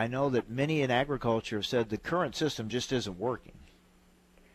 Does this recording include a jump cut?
no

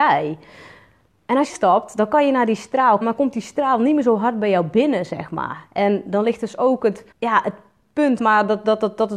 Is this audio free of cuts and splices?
no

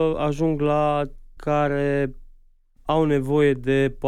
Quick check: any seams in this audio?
yes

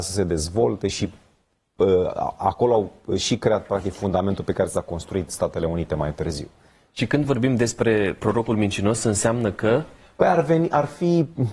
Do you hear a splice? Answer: no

